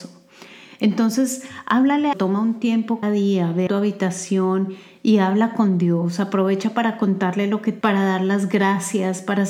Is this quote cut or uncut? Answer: cut